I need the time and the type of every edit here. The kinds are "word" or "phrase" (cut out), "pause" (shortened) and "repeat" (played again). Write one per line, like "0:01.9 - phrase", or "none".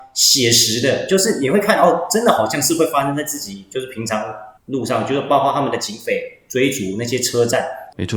0:04.6 - pause